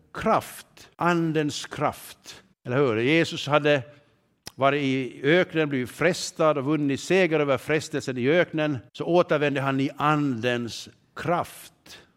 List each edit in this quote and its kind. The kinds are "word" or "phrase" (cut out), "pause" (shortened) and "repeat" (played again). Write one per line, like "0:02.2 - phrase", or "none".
0:00.9 - pause
0:02.5 - pause
0:08.9 - pause